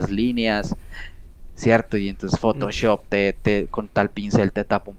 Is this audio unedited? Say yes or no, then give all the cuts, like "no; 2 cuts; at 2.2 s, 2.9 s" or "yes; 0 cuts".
yes; 0 cuts